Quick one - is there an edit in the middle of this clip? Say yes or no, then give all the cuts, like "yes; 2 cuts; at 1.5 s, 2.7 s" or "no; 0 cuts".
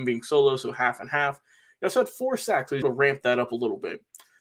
yes; 1 cut; at 2.8 s